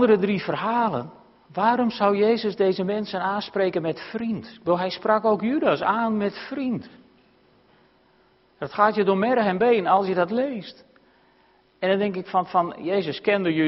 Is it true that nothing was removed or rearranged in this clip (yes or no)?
yes